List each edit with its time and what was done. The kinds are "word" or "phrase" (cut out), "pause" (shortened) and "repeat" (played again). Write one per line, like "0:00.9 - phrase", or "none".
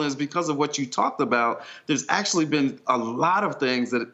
none

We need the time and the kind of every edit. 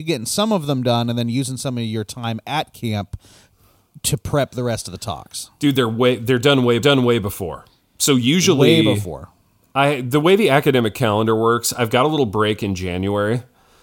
0:06.8 - repeat

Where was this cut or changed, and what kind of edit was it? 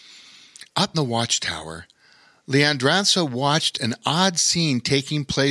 0:00.9 - word

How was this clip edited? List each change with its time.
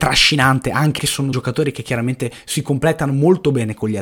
0:01.0 - phrase
0:01.3 - word

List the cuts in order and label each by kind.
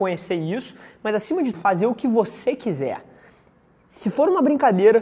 0:01.5 - word

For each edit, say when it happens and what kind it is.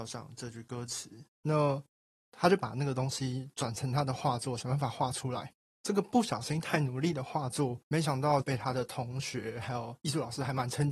0:01.3 - pause

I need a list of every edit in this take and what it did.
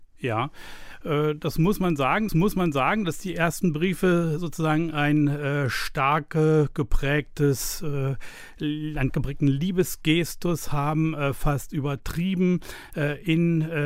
0:02.3 - repeat
0:09.1 - word

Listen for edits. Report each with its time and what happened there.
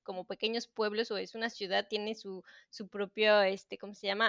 none

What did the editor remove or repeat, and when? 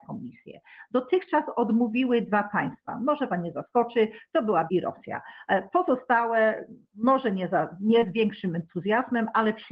0:03.3 - word
0:04.7 - word
0:06.8 - pause

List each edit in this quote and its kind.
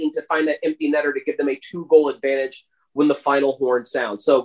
none

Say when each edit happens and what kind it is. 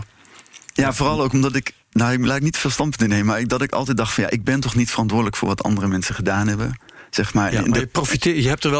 0:01.8 - pause

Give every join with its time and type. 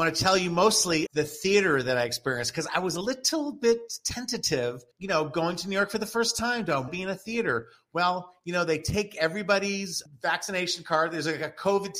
0:01.1 - word
0:04.9 - pause
0:06.9 - word

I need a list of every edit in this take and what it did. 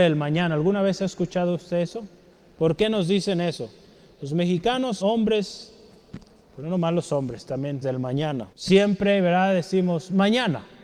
0:05.0 - word
0:07.8 - word
0:08.5 - pause

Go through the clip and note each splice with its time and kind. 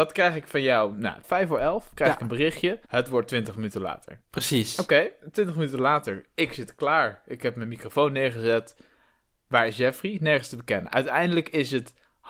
0:01.2 - phrase
0:02.8 - pause
0:04.2 - pause

